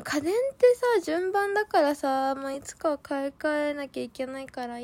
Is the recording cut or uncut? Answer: uncut